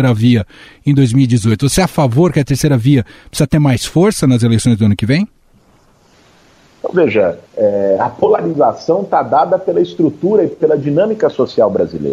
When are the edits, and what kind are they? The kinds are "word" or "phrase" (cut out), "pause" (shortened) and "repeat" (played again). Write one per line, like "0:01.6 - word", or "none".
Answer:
0:07.5 - pause